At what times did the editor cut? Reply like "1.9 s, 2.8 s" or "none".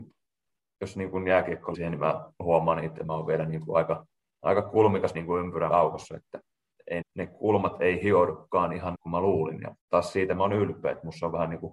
1.7 s, 3.0 s, 4.2 s, 5.1 s, 5.7 s, 7.0 s, 8.9 s, 9.8 s